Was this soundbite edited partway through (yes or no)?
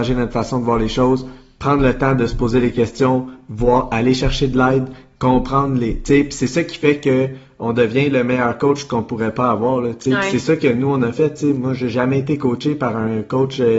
no